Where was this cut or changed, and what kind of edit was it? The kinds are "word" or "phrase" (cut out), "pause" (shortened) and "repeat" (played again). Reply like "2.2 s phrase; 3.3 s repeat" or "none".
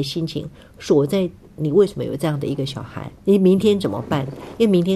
1.4 s pause; 3.2 s pause